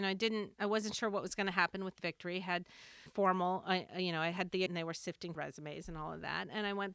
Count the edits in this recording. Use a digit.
4